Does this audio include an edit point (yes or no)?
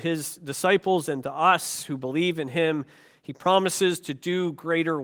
no